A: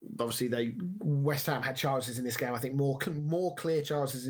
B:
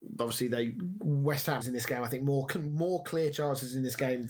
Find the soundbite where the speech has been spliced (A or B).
B